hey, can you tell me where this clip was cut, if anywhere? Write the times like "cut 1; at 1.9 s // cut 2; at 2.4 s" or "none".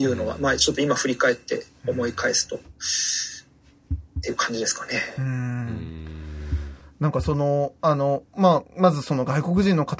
none